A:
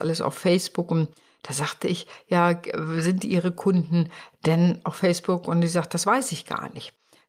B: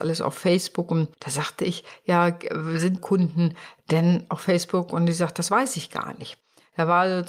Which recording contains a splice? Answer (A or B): B